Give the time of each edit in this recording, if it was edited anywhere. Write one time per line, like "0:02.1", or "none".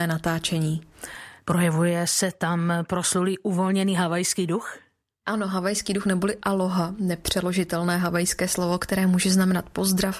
none